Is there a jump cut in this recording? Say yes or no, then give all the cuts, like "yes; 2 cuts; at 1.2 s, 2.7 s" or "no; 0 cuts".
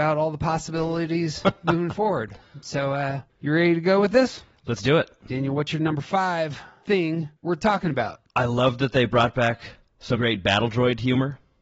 yes; 4 cuts; at 3.3 s, 7.4 s, 8.3 s, 10.2 s